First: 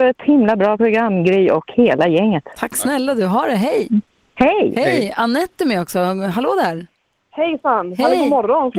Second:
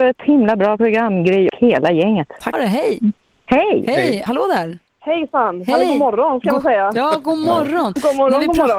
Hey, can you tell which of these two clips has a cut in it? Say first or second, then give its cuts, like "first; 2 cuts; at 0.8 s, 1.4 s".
second; 4 cuts; at 1.5 s, 2.5 s, 4.3 s, 4.9 s